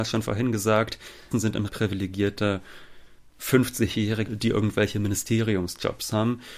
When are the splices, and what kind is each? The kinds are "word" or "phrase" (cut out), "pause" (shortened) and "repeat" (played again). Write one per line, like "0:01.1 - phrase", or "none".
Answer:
0:01.3 - word
0:01.7 - word
0:04.3 - word